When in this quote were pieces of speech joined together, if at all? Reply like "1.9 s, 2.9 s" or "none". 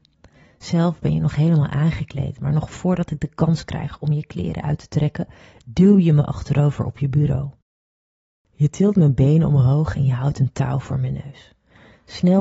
none